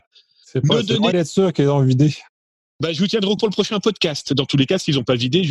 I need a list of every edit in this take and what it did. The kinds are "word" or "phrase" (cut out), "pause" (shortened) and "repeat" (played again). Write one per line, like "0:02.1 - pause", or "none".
0:01.1 - word
0:03.4 - word